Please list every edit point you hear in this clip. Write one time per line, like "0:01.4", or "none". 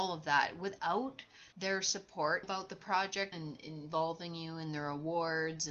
0:01.5
0:02.4
0:03.3